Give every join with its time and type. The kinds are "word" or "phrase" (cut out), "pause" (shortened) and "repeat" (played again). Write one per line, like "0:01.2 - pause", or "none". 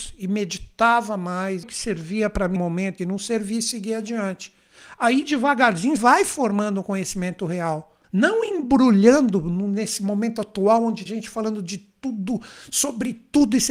0:01.6 - word
0:02.6 - word
0:03.0 - phrase
0:06.0 - word
0:08.0 - pause
0:11.1 - word